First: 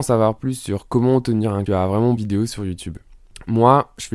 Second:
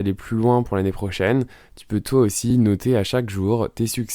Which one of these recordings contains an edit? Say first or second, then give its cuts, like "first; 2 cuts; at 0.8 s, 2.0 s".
first; 2 cuts; at 1.7 s, 2.2 s